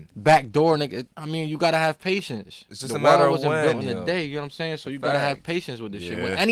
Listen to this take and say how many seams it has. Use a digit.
1